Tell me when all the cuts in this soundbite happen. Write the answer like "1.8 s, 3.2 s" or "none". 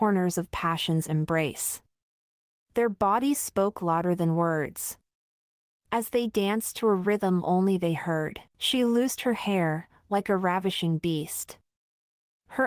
8.5 s

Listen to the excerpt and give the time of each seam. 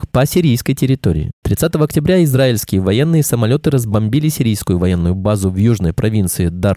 none

